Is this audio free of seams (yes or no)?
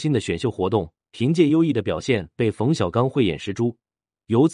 no